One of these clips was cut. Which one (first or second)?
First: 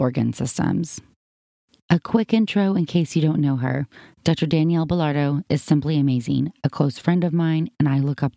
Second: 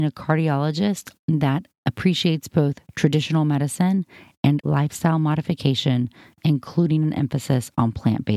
second